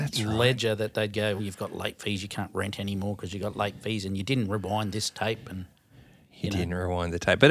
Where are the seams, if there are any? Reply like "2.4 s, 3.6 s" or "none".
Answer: 1.4 s